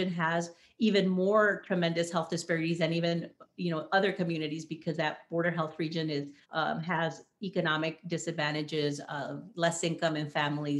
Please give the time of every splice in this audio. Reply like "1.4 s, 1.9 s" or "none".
6.4 s